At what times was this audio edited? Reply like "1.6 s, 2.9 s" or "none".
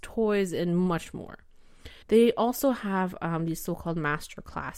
2.0 s